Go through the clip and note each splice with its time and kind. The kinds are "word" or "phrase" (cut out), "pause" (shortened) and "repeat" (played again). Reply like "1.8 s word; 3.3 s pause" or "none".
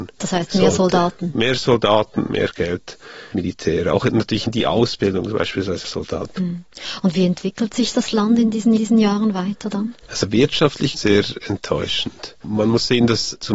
3.3 s word; 5.8 s word; 8.8 s repeat; 10.0 s pause; 10.9 s word; 12.4 s pause